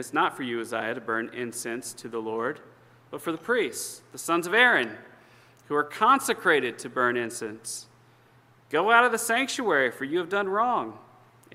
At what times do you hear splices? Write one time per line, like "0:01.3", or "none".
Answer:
none